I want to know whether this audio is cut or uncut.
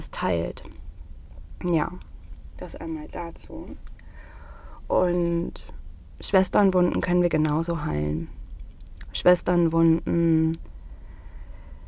uncut